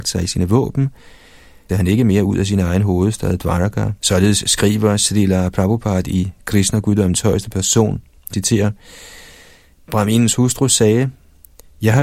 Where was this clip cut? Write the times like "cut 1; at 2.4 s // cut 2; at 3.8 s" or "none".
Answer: cut 1; at 1.7 s // cut 2; at 4.0 s // cut 3; at 8.3 s